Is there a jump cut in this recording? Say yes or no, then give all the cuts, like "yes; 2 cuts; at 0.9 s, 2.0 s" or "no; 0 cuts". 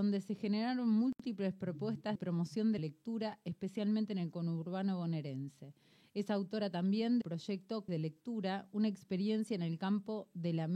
yes; 4 cuts; at 2.2 s, 2.8 s, 7.2 s, 7.9 s